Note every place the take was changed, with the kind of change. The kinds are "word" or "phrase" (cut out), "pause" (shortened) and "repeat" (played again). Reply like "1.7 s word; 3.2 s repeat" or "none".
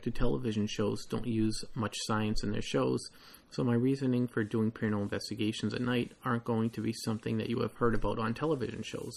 none